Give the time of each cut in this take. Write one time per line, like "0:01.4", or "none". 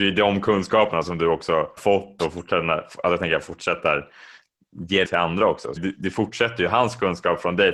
0:01.8
0:05.0
0:05.8

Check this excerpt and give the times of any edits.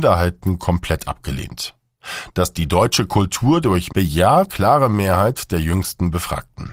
0:03.9
0:04.5

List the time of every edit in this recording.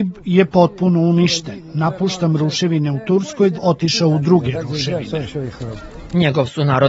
0:03.5

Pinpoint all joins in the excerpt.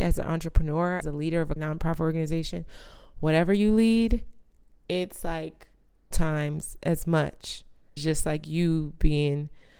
0:01.0
0:01.6
0:06.1
0:08.0

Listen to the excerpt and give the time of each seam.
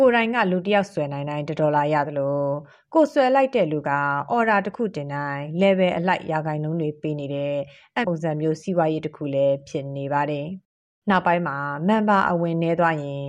0:08.0

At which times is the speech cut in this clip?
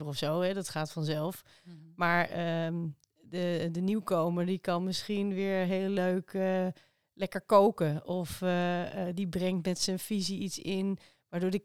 none

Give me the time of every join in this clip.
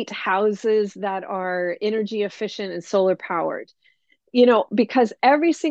none

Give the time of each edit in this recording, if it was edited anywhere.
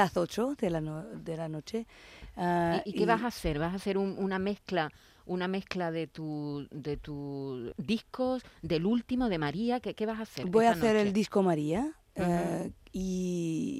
0:07.7

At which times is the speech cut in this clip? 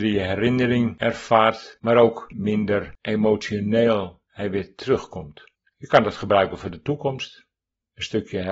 0:05.5

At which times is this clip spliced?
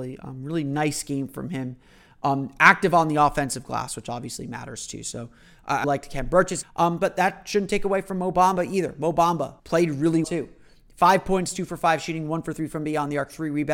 0:05.8
0:06.6
0:09.6
0:10.2

